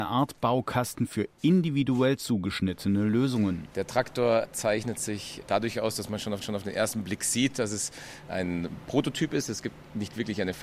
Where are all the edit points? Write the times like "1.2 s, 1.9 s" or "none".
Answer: 6.4 s